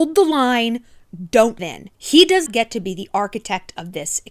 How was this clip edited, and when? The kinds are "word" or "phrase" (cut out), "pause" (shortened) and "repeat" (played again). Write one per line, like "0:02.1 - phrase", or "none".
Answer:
0:01.6 - word
0:01.9 - pause
0:02.5 - word